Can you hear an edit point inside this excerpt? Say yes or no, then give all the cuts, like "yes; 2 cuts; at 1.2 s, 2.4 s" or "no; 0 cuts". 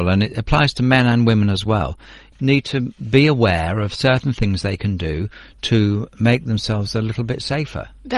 no; 0 cuts